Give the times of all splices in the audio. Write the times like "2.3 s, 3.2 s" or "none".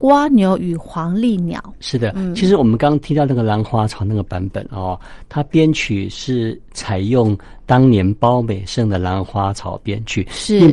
none